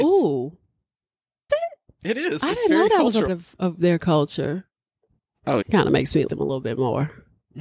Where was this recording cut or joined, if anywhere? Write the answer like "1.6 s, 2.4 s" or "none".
1.5 s, 3.3 s, 5.6 s, 6.3 s

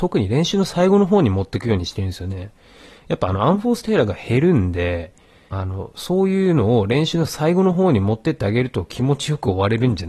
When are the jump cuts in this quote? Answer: 5.5 s

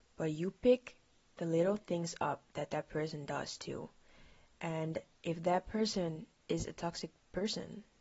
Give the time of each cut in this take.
none

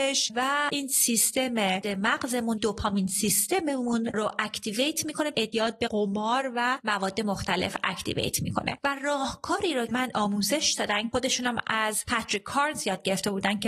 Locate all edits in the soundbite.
1.8 s, 2.6 s, 5.3 s, 9.9 s, 11.1 s

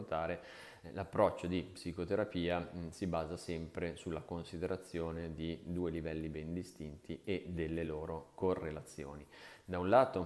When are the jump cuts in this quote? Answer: none

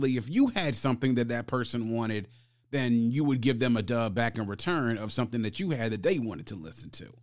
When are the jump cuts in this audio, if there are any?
none

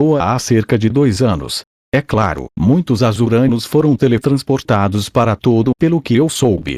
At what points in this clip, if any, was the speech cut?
1.7 s, 2.5 s, 5.7 s

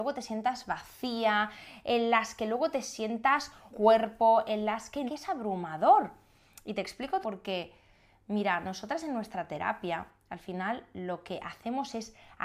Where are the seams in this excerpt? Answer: 3.7 s, 5.1 s, 7.2 s

